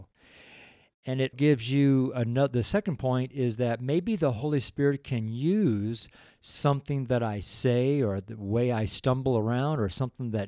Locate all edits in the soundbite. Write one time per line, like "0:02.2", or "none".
0:01.3